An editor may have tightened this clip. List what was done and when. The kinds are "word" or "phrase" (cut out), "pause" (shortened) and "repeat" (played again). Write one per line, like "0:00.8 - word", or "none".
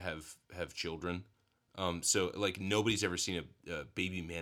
none